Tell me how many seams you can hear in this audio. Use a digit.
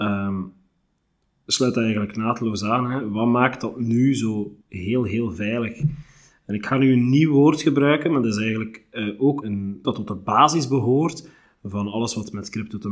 3